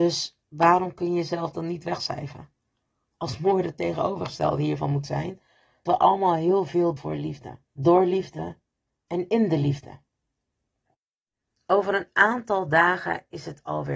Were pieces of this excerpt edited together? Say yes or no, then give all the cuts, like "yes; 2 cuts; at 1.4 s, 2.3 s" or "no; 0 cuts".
yes; 3 cuts; at 5.9 s, 7.0 s, 7.7 s